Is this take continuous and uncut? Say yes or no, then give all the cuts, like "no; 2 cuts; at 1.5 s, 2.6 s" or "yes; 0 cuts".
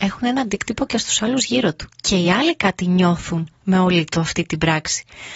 yes; 0 cuts